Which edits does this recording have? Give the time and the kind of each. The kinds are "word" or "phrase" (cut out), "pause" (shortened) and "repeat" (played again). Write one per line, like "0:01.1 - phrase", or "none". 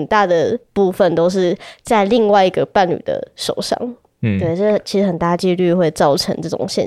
none